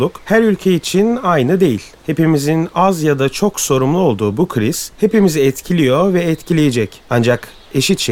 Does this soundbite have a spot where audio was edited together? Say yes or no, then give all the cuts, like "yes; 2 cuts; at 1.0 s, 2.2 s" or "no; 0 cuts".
no; 0 cuts